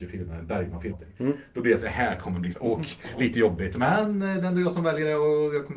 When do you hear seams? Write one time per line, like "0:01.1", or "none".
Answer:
0:00.9
0:01.8
0:02.5